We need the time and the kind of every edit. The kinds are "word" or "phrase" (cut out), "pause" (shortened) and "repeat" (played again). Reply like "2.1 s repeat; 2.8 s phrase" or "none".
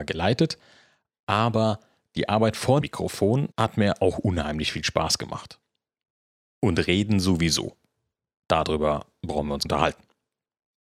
2.8 s word; 3.5 s pause; 9.6 s phrase

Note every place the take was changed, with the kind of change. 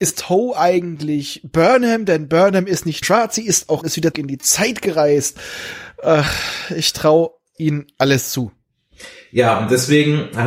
3.0 s word; 3.8 s phrase; 4.1 s word

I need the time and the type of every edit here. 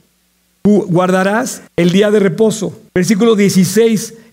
1.7 s pause; 2.9 s pause

